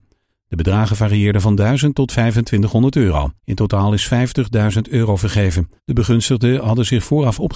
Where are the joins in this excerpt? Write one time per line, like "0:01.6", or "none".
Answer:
0:03.4
0:05.8